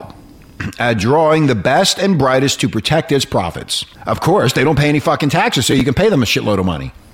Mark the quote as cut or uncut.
cut